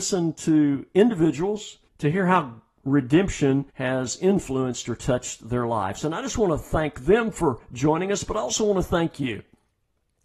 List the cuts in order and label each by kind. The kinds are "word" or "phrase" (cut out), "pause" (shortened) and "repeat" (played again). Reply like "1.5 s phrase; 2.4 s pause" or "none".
1.9 s pause; 3.7 s pause